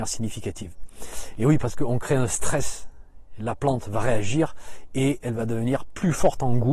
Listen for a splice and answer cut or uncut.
uncut